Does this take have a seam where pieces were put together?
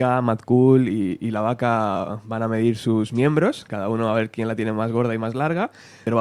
no; 0 cuts

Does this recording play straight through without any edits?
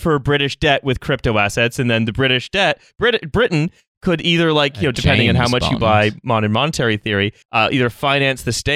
no; 1 cut; at 7.4 s

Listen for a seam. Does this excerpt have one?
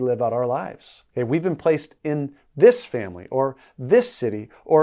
yes; 1 cut; at 1.1 s

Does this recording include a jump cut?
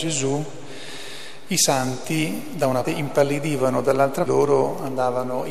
yes; 2 cuts; at 2.8 s, 4.3 s

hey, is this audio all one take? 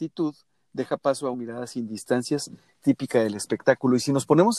no; 2 cuts; at 1.3 s, 2.8 s

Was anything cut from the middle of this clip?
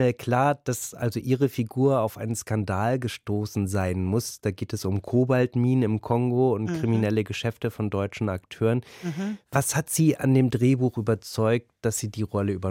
no; 0 cuts

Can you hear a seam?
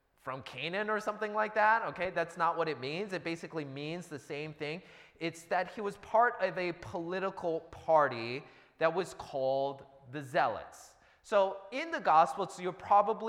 no; 0 cuts

